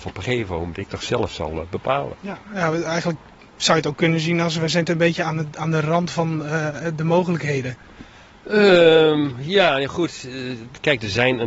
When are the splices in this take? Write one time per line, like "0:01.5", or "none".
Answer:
none